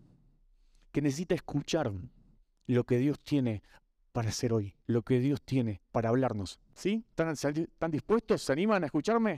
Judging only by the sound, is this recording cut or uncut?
cut